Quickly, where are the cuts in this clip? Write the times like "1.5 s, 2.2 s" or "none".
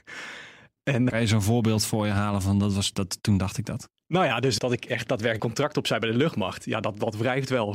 1.1 s, 4.0 s, 4.6 s, 5.4 s